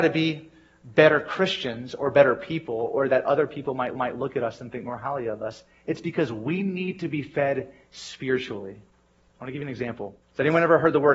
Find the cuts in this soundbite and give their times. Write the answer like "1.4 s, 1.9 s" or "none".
4.0 s, 10.2 s